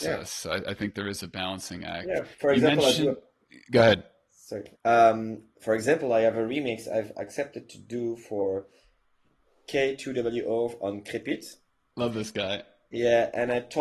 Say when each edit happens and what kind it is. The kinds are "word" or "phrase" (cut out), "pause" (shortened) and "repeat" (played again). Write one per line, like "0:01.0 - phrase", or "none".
0:02.3 - pause
0:04.7 - pause